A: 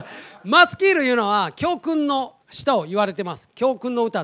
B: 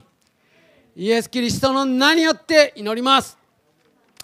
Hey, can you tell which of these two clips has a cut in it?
A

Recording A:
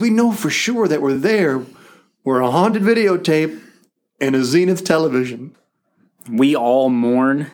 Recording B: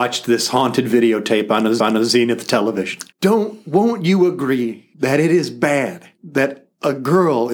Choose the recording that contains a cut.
B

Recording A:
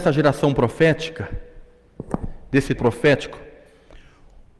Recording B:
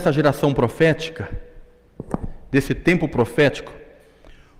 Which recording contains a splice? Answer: A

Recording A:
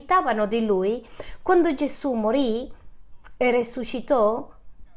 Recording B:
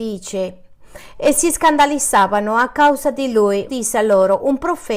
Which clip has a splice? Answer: B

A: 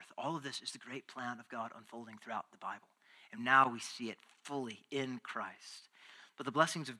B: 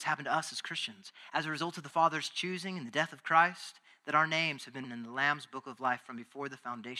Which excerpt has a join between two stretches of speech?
B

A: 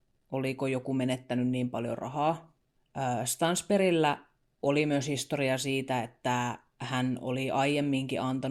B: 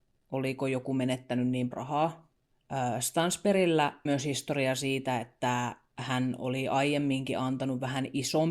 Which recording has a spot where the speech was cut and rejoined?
B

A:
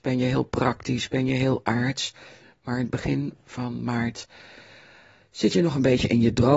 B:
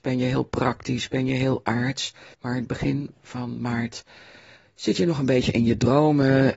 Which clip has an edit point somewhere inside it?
B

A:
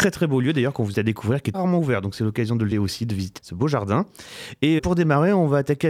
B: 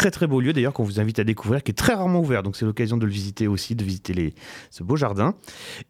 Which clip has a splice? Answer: A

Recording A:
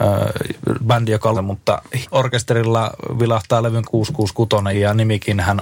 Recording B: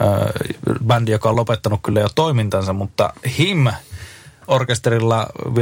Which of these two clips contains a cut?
A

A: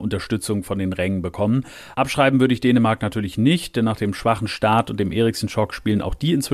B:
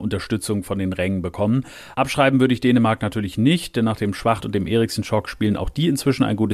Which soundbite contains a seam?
B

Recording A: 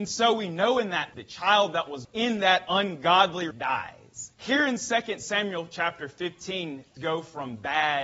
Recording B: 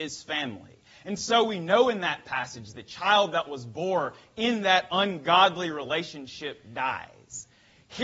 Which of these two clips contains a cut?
A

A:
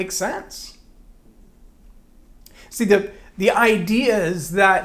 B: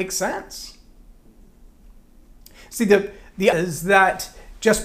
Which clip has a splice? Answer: B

